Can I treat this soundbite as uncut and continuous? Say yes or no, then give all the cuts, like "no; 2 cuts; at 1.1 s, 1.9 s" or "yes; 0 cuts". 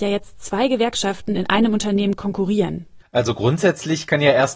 no; 1 cut; at 3.0 s